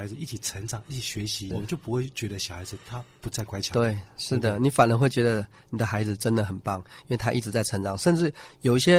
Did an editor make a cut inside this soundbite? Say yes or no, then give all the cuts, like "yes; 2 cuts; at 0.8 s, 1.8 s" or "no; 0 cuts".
yes; 1 cut; at 1.5 s